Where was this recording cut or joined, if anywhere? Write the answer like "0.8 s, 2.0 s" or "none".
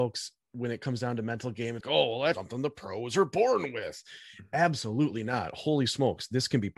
1.8 s, 2.3 s